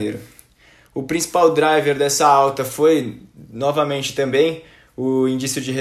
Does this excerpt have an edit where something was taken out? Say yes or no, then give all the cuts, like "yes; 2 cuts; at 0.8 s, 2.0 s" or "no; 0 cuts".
no; 0 cuts